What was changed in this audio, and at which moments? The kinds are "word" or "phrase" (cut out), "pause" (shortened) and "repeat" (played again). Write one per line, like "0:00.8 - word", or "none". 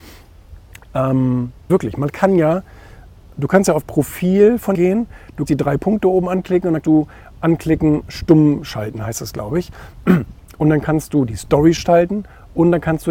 0:01.7 - word
0:03.8 - word
0:04.7 - word
0:05.5 - word
0:06.8 - word
0:08.1 - word
0:11.8 - word